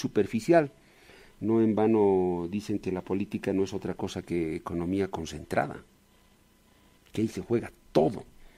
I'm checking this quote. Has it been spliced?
no; 0 cuts

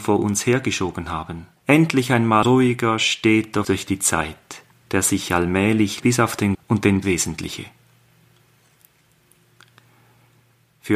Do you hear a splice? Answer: yes; 7 cuts; at 1.6 s, 2.4 s, 3.6 s, 4.7 s, 6.0 s, 6.5 s, 7.0 s

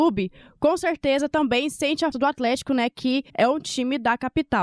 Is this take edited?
yes; 2 cuts; at 2.1 s, 3.3 s

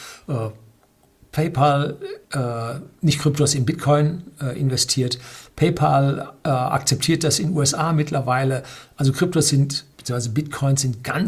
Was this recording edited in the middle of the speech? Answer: yes; 2 cuts; at 2.2 s, 9.9 s

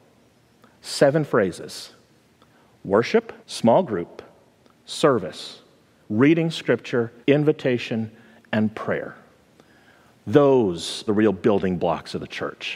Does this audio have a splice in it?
yes; 4 cuts; at 3.4 s, 6.0 s, 7.2 s, 11.1 s

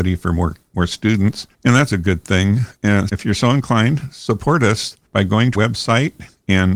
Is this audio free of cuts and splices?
no; 5 cuts; at 1.5 s, 1.9 s, 3.1 s, 5.1 s, 5.5 s

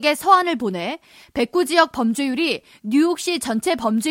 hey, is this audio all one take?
yes; 0 cuts

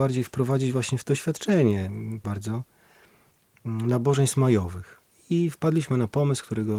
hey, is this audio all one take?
no; 2 cuts; at 1.0 s, 2.2 s

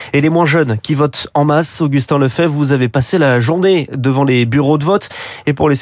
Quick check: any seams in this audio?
no; 0 cuts

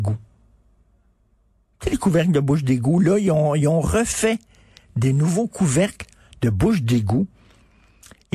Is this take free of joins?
yes; 0 cuts

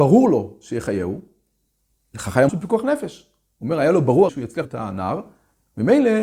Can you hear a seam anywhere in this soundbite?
yes; 3 cuts; at 2.5 s, 4.3 s, 4.6 s

